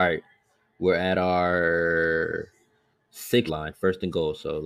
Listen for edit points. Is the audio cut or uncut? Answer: cut